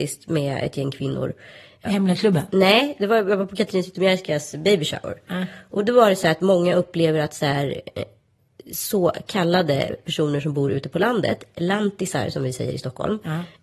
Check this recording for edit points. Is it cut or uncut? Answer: cut